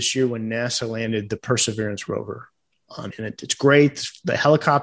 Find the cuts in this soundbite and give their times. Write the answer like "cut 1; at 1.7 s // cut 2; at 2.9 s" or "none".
cut 1; at 3.1 s